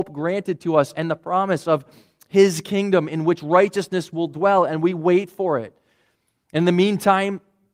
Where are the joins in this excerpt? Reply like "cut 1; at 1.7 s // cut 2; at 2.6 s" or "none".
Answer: none